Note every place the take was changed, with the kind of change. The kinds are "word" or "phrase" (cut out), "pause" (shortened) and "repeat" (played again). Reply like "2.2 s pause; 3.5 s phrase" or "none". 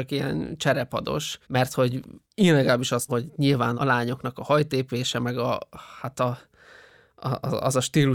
1.4 s pause; 2.2 s pause; 3.1 s word; 3.8 s word